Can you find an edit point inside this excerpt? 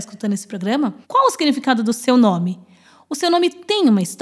yes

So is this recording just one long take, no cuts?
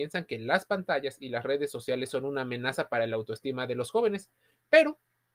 yes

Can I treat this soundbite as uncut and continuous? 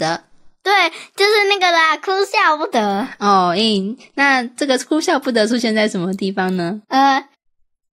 no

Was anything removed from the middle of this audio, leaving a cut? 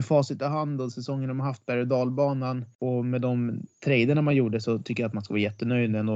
no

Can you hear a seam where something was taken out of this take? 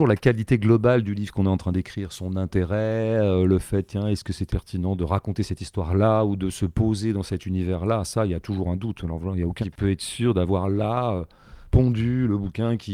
yes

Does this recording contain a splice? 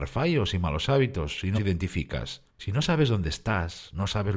yes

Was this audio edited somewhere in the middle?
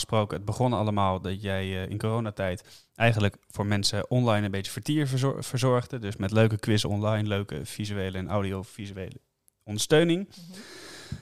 no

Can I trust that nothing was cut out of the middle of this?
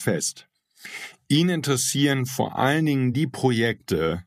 yes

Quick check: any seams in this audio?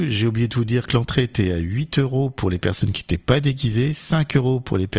no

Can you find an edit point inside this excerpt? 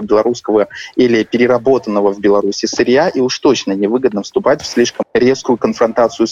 yes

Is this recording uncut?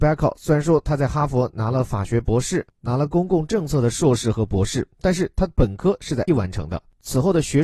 no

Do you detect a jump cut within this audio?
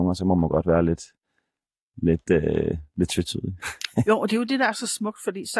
no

